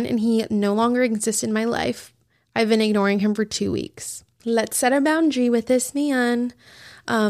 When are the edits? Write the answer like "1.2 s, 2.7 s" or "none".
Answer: none